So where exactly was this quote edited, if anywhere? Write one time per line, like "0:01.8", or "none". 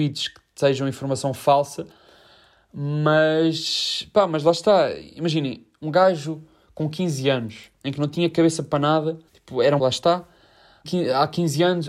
0:05.8
0:09.3
0:09.8
0:10.8